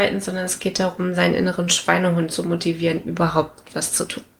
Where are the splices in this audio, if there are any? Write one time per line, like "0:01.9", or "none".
none